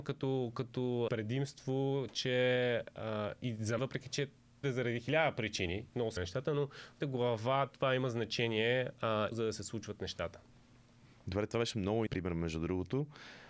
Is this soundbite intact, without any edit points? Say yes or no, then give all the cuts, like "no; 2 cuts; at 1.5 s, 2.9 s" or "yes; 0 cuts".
no; 7 cuts; at 1.1 s, 3.8 s, 4.6 s, 6.2 s, 7.0 s, 9.3 s, 12.1 s